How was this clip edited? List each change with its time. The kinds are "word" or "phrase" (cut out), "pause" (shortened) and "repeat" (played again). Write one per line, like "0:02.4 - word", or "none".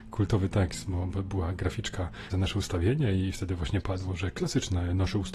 0:02.3 - word